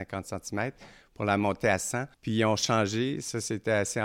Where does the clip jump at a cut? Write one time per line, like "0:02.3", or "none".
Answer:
0:02.1